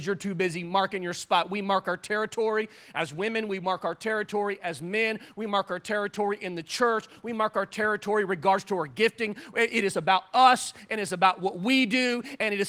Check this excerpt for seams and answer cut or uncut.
uncut